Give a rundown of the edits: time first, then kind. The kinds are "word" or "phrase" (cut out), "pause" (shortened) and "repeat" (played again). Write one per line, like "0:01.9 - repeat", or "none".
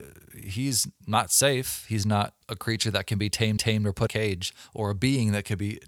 0:02.4 - pause
0:03.6 - repeat
0:04.1 - phrase